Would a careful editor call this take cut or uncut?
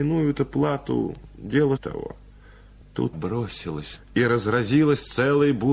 cut